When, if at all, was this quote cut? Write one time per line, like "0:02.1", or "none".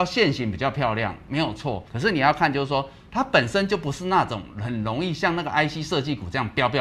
0:01.9